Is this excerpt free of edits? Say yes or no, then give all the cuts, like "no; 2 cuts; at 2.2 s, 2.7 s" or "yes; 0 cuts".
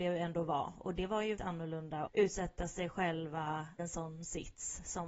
no; 3 cuts; at 1.4 s, 2.1 s, 3.8 s